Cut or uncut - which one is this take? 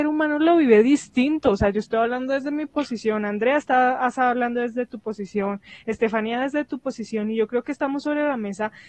uncut